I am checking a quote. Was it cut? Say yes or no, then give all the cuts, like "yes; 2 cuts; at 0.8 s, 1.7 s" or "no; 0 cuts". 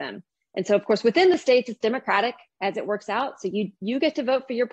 no; 0 cuts